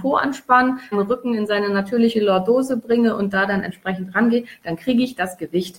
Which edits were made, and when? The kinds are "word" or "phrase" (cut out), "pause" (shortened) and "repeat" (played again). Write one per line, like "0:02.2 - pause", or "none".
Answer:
0:00.9 - word